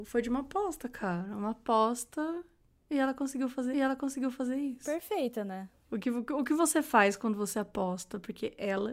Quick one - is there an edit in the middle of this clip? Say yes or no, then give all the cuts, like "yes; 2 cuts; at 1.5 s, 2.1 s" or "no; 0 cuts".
yes; 1 cut; at 3.7 s